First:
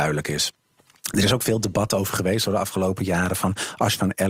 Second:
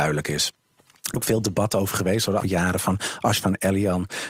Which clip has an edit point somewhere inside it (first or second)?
second